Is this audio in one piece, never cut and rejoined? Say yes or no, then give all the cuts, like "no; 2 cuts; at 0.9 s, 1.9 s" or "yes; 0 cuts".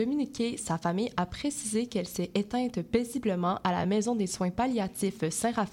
yes; 0 cuts